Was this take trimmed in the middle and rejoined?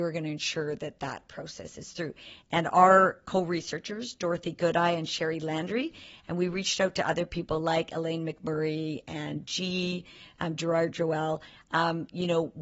no; 0 cuts

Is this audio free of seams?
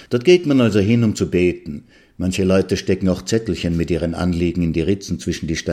yes; 0 cuts

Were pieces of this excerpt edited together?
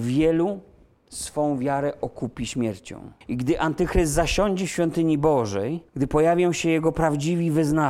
yes; 2 cuts; at 3.2 s, 5.9 s

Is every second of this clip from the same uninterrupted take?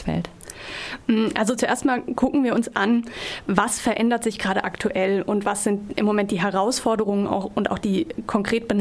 yes; 0 cuts

